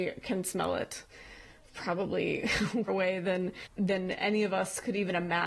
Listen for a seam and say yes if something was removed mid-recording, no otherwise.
yes